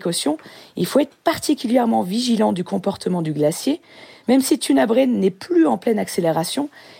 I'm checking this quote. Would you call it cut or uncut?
uncut